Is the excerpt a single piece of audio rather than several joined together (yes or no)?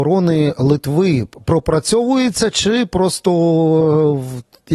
yes